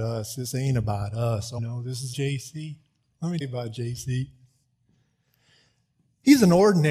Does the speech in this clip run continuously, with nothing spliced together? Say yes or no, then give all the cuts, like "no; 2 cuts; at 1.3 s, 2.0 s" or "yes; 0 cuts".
no; 3 cuts; at 1.6 s, 2.1 s, 3.4 s